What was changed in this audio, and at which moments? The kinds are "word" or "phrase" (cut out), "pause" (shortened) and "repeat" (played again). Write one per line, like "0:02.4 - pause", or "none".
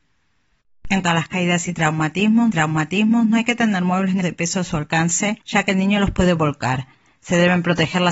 0:01.0 - word
0:02.5 - repeat
0:04.2 - word
0:05.4 - pause